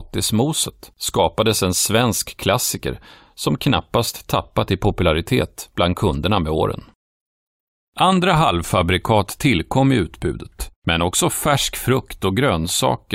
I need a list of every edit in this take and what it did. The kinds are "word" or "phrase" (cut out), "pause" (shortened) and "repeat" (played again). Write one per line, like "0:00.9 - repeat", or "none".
none